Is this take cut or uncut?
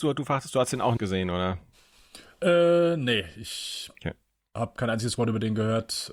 cut